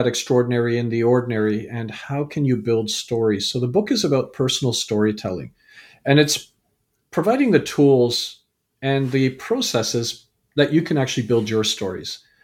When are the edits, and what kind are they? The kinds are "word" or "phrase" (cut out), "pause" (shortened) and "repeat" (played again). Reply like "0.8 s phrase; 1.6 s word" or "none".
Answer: none